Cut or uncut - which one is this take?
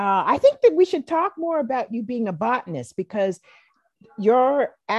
uncut